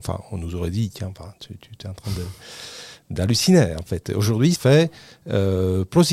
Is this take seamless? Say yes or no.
no